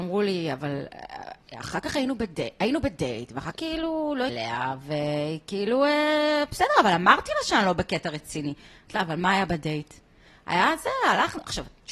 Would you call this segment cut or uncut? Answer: cut